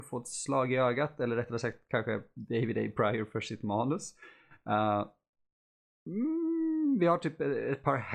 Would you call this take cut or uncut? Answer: uncut